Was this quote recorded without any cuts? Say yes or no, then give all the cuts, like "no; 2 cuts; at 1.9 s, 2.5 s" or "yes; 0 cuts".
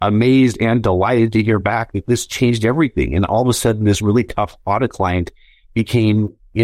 yes; 0 cuts